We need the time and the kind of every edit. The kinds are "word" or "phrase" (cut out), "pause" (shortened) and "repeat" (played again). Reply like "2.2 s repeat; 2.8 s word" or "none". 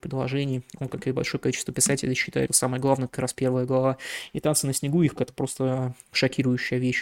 2.5 s word; 5.2 s word